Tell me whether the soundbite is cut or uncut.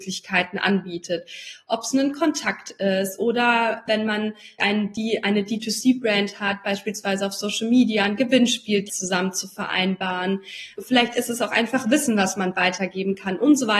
cut